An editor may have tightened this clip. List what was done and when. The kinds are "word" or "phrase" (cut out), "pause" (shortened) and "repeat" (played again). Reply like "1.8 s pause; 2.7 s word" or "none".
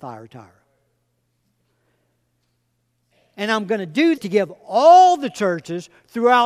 4.2 s word